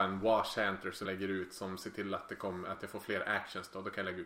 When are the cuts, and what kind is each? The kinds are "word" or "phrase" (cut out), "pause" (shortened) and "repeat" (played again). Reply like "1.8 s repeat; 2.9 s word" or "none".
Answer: 1.0 s word

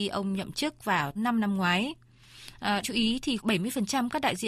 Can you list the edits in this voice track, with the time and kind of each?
1.2 s word; 2.8 s word; 3.4 s word

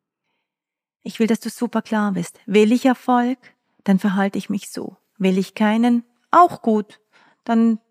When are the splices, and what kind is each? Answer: none

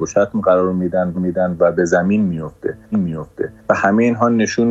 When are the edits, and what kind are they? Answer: 1.1 s repeat; 2.9 s repeat

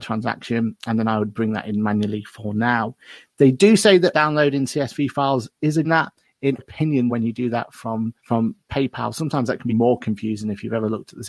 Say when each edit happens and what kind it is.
4.1 s word; 5.8 s phrase; 6.6 s word; 7.1 s word; 8.2 s pause; 9.7 s word

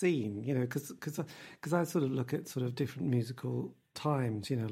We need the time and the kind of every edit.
none

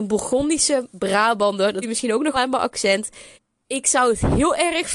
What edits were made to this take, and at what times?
1.8 s word; 2.3 s word; 3.3 s pause

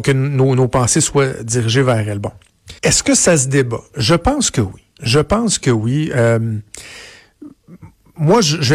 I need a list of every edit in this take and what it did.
2.8 s pause

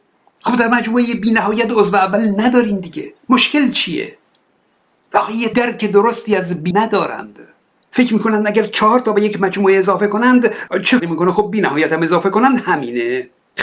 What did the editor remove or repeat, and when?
3.2 s pause; 5.5 s phrase; 6.7 s word; 11.0 s word

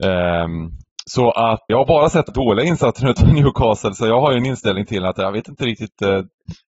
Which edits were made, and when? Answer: 1.7 s word; 2.3 s word

